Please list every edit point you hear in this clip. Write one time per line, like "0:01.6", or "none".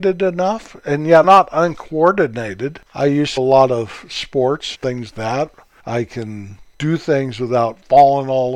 0:01.2
0:02.9
0:03.4
0:04.7
0:05.1